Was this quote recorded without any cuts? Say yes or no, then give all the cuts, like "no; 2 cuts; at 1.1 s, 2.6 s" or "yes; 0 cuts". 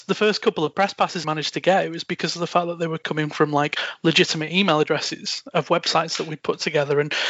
no; 1 cut; at 1.2 s